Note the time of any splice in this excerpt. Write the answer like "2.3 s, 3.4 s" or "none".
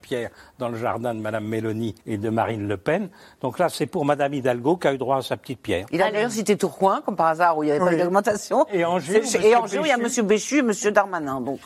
2.0 s